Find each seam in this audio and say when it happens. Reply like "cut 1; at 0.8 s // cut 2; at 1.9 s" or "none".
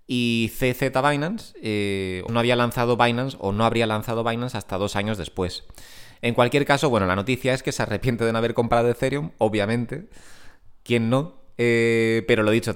cut 1; at 2.3 s